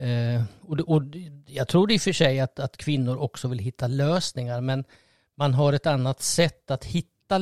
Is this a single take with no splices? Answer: yes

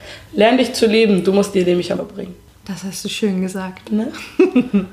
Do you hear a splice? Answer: yes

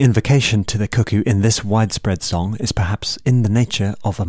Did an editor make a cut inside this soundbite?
no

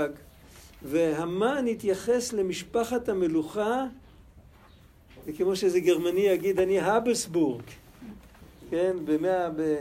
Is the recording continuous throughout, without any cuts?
yes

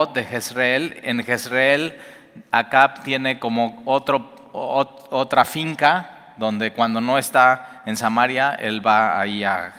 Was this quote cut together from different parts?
no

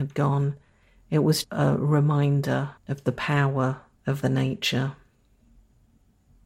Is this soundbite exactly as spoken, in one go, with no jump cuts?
no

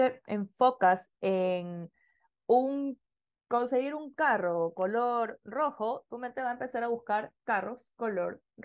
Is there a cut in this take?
no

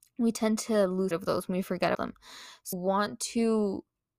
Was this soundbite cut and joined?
yes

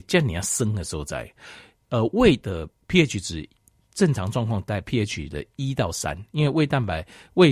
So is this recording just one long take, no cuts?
yes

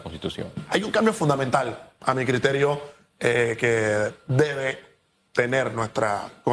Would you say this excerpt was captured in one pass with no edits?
yes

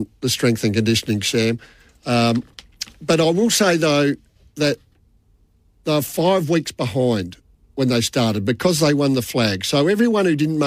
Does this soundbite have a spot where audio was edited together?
no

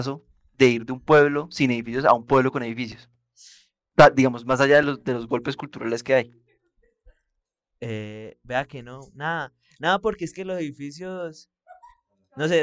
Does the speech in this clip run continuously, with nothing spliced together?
yes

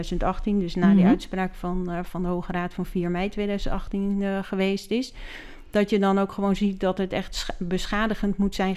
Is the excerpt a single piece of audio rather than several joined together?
yes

